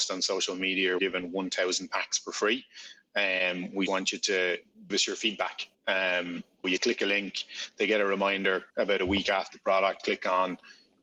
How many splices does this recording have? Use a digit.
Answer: 7